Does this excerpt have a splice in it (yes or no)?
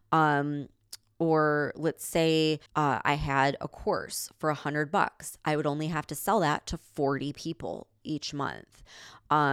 yes